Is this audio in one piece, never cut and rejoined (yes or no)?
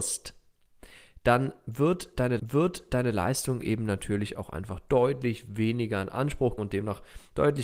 no